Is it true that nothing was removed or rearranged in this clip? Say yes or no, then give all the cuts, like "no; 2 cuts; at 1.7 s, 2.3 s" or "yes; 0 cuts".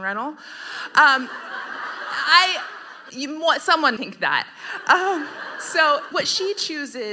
no; 3 cuts; at 3.1 s, 4.0 s, 6.1 s